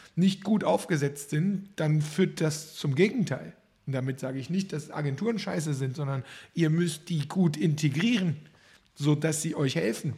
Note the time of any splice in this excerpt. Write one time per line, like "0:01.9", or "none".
none